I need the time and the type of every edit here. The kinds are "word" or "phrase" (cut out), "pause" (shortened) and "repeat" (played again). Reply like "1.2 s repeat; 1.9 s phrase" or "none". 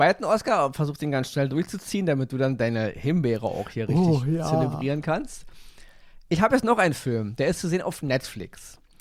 none